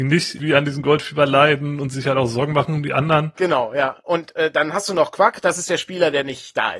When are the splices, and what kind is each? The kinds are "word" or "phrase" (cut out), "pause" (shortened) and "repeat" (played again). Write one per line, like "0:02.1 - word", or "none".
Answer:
none